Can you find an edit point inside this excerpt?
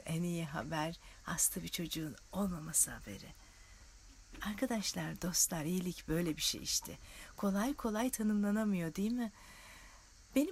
no; 0 cuts

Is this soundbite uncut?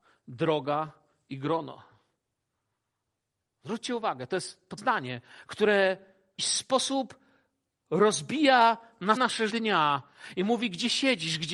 no; 4 cuts; at 4.8 s, 6.4 s, 9.2 s, 9.5 s

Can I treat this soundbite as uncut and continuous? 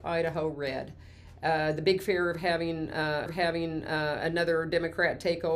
no; 1 cut; at 3.3 s

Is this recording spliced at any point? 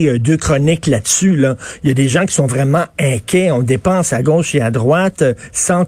no; 0 cuts

